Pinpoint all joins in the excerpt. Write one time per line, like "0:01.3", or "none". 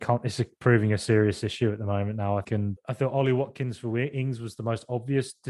0:02.4
0:02.8